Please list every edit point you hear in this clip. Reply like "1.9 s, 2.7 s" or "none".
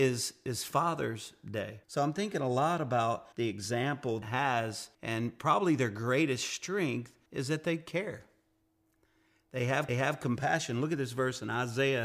1.8 s, 3.3 s, 4.2 s, 4.9 s, 7.3 s, 9.9 s